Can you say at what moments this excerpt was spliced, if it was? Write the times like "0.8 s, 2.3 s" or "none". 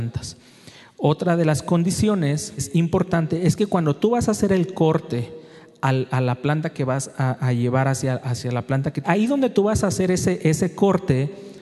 2.6 s, 9.0 s